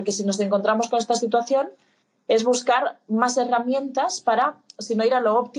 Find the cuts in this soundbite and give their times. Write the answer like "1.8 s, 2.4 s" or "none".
none